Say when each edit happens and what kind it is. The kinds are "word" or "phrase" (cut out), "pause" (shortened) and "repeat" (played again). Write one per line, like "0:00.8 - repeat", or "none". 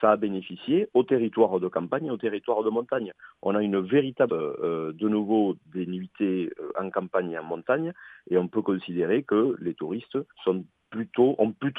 0:04.3 - word
0:10.3 - pause